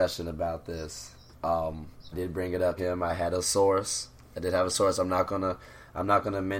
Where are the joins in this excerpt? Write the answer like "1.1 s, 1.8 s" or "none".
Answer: 2.1 s, 2.8 s